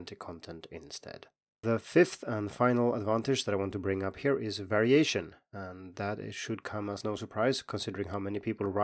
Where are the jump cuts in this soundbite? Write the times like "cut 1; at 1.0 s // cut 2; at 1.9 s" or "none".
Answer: none